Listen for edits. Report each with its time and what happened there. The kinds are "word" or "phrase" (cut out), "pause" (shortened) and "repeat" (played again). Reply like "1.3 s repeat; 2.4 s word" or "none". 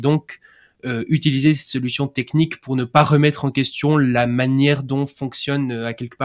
none